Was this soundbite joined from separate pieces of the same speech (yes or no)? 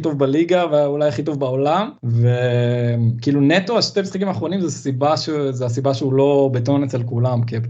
yes